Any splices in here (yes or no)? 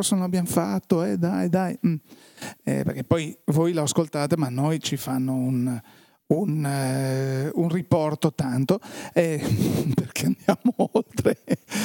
no